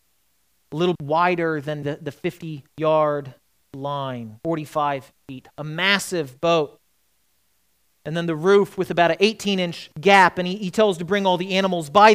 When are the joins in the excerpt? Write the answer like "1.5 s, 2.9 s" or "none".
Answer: 1.0 s, 1.8 s, 2.7 s, 4.4 s, 5.5 s, 9.9 s